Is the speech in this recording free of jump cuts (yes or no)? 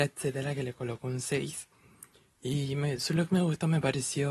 yes